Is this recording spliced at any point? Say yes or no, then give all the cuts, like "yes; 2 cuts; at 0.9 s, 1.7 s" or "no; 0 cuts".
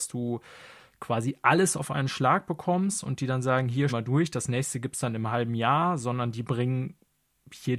yes; 1 cut; at 3.9 s